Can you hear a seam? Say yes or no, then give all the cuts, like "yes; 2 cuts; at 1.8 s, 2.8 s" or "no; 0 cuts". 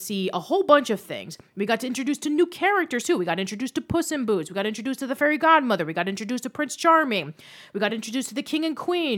no; 0 cuts